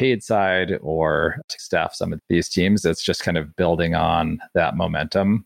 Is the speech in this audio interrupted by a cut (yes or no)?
no